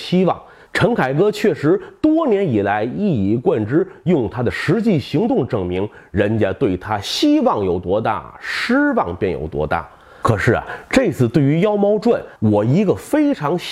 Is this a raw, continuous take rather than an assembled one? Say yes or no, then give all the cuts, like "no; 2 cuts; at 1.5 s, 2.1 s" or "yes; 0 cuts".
no; 1 cut; at 12.4 s